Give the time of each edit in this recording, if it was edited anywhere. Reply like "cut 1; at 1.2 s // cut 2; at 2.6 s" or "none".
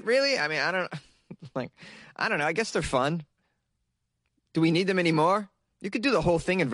none